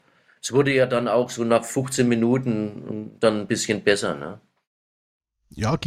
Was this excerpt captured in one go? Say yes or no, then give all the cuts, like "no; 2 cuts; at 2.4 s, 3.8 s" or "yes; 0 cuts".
yes; 0 cuts